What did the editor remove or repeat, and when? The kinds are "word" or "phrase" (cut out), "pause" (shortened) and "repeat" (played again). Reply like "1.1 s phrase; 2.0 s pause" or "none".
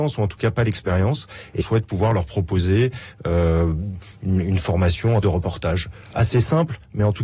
1.6 s phrase; 5.2 s word